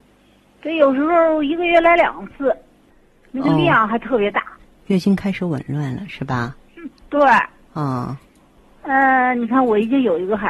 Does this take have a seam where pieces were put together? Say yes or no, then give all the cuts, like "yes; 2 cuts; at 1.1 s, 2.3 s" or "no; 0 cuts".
no; 0 cuts